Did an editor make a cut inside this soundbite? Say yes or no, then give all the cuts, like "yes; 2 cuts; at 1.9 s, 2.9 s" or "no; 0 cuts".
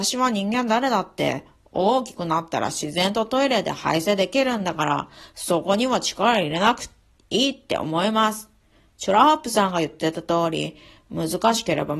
no; 0 cuts